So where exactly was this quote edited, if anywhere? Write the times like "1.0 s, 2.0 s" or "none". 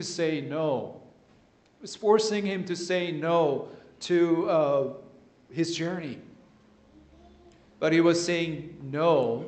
none